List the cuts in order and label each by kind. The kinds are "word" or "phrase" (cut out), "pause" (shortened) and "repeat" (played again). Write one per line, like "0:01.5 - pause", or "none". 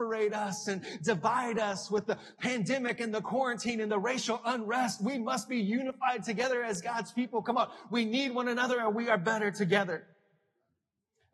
none